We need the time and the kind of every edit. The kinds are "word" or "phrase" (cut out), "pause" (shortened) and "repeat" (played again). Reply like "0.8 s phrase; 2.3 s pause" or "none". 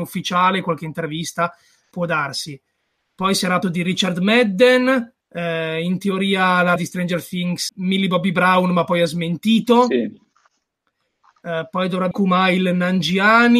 3.6 s word; 5.2 s pause; 6.8 s word; 7.7 s word; 12.1 s word